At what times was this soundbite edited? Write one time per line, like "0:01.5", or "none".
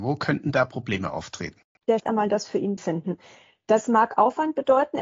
0:02.0
0:02.8